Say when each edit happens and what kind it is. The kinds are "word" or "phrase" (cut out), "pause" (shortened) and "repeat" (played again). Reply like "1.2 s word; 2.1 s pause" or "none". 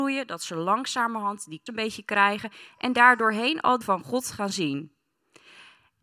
1.7 s word; 3.8 s word